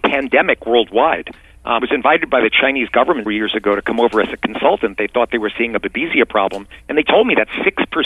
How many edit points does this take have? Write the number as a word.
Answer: three